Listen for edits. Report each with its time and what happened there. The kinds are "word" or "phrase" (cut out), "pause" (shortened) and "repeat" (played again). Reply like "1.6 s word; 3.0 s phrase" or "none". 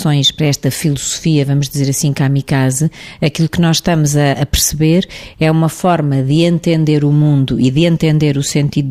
none